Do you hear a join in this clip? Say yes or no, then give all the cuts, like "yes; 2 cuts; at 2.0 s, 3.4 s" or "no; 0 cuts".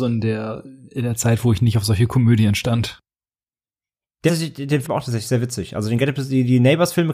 yes; 2 cuts; at 4.3 s, 4.8 s